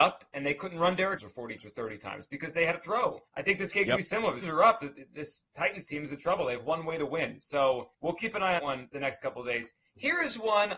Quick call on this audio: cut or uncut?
cut